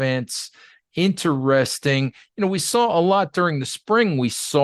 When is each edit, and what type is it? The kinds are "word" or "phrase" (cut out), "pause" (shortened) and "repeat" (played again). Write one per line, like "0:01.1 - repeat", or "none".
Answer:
none